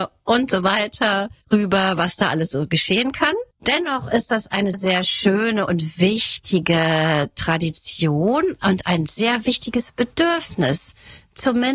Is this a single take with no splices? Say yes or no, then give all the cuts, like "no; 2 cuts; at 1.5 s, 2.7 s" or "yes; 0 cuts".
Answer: no; 3 cuts; at 1.4 s, 3.5 s, 4.7 s